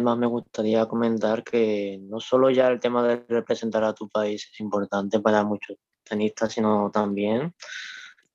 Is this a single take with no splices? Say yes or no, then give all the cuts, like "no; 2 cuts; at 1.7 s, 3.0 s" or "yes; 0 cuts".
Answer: yes; 0 cuts